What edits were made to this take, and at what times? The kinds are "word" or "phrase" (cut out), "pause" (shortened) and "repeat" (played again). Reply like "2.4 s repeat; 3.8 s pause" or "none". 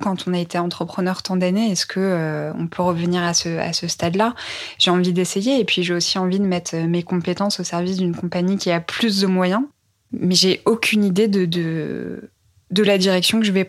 none

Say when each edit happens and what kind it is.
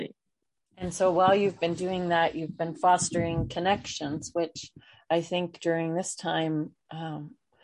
none

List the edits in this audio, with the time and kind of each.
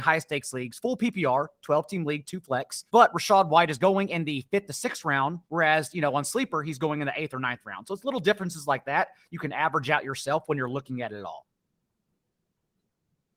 2.9 s pause; 5.4 s pause

